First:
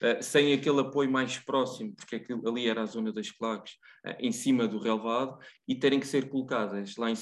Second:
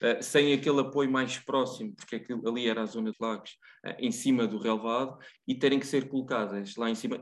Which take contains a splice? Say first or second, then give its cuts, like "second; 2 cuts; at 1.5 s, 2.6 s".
second; 1 cut; at 3.1 s